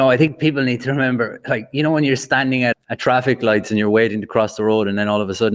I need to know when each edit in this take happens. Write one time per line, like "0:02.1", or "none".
0:02.7